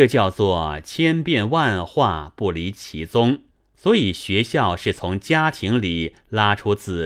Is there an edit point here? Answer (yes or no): yes